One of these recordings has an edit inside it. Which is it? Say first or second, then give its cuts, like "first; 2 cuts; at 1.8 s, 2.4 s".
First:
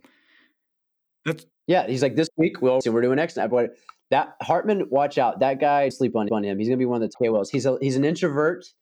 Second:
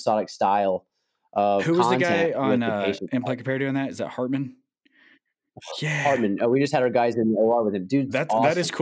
first; 5 cuts; at 1.6 s, 2.8 s, 5.9 s, 6.3 s, 7.1 s